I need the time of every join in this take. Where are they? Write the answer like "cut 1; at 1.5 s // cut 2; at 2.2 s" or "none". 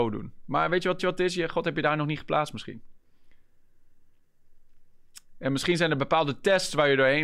cut 1; at 1.0 s